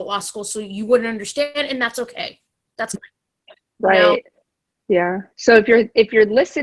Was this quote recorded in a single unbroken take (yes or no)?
no